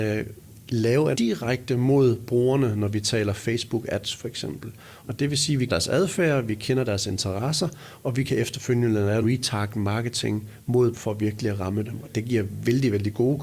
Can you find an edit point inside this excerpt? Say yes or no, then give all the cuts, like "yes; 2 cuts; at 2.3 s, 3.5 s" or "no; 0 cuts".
yes; 4 cuts; at 1.1 s, 5.7 s, 9.2 s, 10.9 s